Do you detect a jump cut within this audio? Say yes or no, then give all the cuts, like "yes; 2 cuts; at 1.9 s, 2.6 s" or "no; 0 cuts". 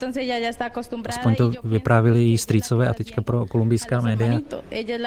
yes; 1 cut; at 3.0 s